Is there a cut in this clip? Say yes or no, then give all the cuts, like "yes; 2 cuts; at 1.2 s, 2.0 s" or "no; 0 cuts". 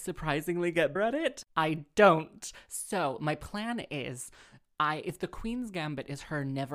yes; 2 cuts; at 1.0 s, 1.5 s